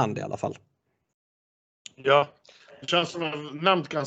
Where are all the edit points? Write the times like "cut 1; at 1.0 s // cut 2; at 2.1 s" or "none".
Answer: none